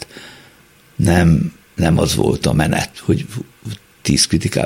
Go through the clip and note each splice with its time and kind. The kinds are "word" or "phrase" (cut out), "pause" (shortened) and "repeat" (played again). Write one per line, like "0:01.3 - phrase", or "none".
0:01.6 - pause
0:02.9 - word